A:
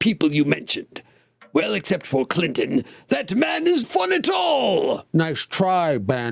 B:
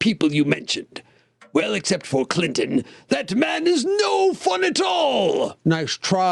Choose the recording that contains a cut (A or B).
A